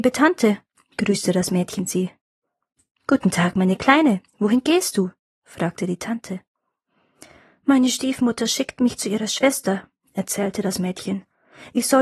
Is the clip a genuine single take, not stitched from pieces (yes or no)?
yes